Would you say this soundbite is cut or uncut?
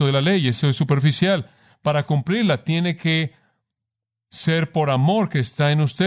uncut